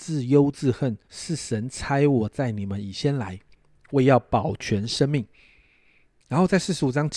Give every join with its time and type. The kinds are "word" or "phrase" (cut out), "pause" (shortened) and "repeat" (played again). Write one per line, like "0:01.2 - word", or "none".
0:01.0 - pause